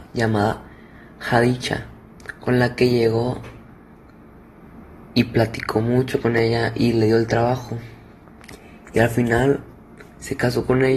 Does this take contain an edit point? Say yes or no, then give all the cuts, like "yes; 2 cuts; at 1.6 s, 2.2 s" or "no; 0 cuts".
no; 0 cuts